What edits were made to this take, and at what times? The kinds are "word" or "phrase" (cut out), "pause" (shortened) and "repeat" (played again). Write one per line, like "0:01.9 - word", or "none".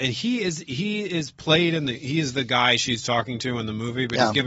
none